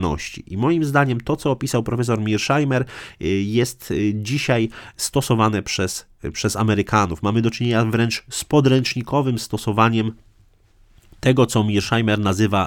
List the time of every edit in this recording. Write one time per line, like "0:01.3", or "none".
none